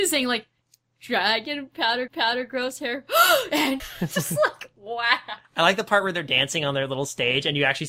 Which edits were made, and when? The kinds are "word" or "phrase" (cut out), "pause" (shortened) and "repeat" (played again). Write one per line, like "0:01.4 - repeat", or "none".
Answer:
0:02.1 - repeat
0:03.8 - word
0:05.4 - pause